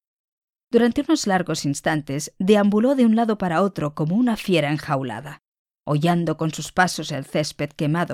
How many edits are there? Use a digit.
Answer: 0